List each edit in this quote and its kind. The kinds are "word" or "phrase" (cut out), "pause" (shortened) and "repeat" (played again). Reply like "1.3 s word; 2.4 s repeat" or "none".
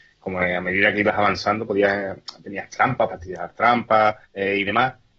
3.1 s word; 4.2 s pause